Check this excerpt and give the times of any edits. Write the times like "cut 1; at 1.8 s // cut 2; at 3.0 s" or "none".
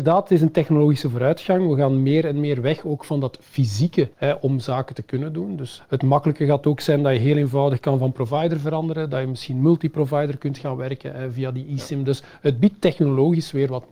cut 1; at 4.1 s // cut 2; at 5.8 s